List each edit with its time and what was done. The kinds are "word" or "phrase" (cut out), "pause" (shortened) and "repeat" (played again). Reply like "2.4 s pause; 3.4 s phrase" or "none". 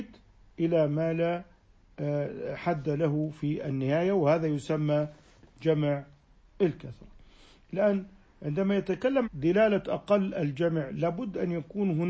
9.2 s word